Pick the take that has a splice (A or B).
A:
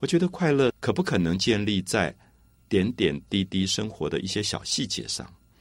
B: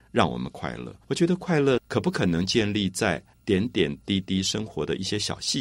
B